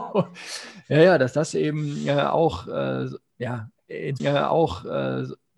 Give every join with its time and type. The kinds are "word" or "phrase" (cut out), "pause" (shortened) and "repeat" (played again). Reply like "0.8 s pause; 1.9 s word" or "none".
4.2 s repeat